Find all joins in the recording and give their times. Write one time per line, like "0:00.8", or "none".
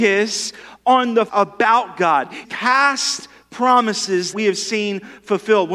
0:01.3
0:02.4
0:04.3